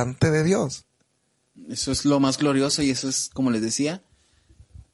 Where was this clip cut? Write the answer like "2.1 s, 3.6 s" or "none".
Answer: none